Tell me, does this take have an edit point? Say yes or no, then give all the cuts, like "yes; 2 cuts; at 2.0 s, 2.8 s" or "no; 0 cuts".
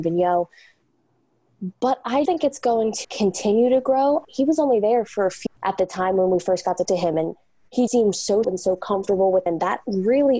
yes; 8 cuts; at 2.3 s, 3.0 s, 4.2 s, 5.5 s, 6.8 s, 7.9 s, 8.4 s, 9.5 s